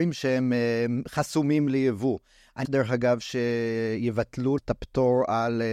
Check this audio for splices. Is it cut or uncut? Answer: cut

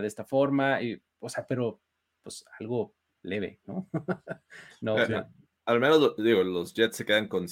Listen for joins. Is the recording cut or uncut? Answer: uncut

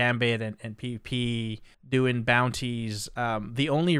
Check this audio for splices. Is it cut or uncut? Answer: cut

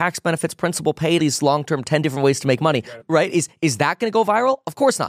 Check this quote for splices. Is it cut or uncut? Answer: cut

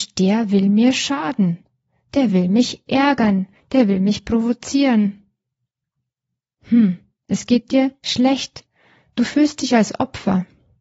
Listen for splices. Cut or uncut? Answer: uncut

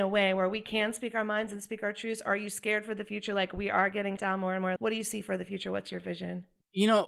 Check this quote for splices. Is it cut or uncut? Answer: cut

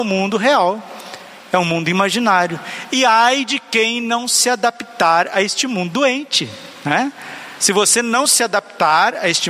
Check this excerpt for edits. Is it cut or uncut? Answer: uncut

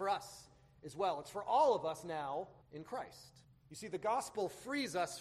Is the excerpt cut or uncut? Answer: cut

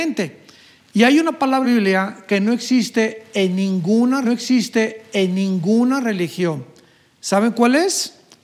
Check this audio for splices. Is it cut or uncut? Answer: cut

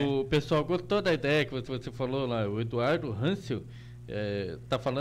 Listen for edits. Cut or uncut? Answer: cut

